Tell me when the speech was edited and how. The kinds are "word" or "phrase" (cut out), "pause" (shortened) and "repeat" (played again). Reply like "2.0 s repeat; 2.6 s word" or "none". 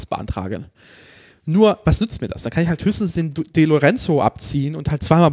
none

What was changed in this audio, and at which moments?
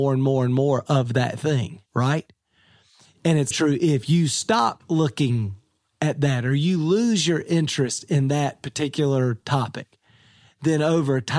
1.9 s pause; 3.5 s word

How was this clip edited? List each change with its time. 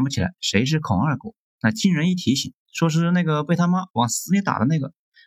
2.6 s pause

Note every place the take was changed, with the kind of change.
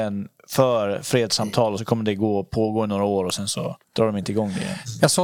1.8 s word; 3.8 s pause

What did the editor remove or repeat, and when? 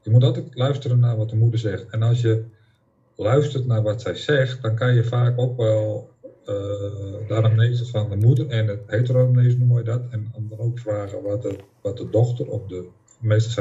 none

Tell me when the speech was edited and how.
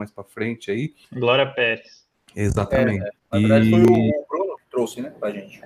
1.0 s pause; 2.1 s pause; 3.2 s pause

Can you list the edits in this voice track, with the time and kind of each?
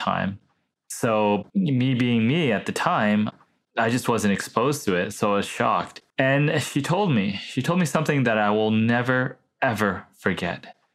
1.5 s pause; 6.1 s pause

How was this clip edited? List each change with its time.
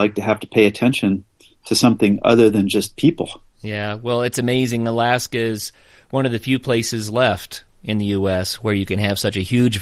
none

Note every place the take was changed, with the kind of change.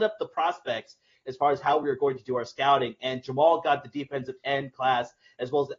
none

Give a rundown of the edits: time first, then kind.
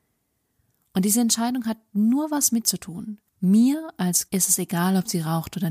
2.6 s word; 3.3 s pause; 4.3 s word

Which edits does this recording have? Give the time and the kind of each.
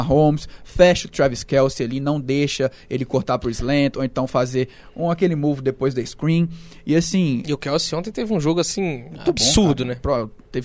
none

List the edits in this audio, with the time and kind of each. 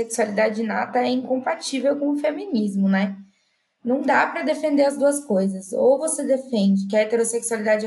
none

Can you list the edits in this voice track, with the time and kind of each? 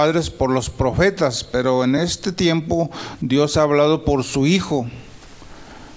none

